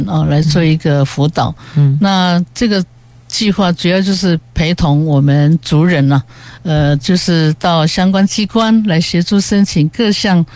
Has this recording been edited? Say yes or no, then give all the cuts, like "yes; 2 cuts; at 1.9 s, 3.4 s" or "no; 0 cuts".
no; 0 cuts